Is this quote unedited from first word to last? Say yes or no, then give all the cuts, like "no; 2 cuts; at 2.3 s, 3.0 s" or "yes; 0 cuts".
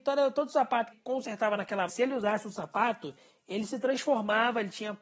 no; 2 cuts; at 0.9 s, 1.9 s